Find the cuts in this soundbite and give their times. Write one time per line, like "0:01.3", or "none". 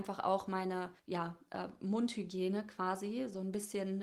0:01.0